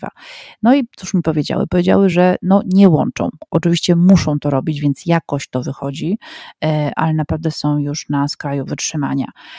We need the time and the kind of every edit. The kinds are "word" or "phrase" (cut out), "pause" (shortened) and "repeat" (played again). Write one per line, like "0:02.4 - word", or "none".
none